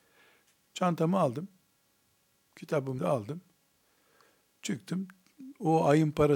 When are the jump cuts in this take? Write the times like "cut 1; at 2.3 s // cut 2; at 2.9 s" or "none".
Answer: cut 1; at 3.0 s